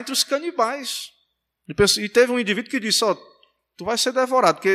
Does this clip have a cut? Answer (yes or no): no